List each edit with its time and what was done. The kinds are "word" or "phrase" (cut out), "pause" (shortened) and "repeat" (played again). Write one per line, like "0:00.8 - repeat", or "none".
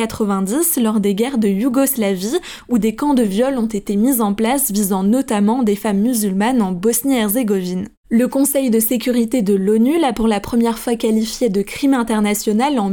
none